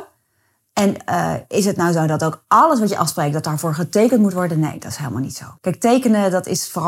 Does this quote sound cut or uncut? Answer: cut